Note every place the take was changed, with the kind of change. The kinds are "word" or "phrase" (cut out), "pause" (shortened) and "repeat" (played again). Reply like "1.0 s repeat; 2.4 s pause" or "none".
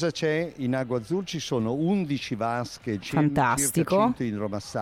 3.0 s phrase